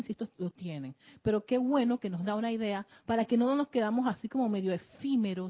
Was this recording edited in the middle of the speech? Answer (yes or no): no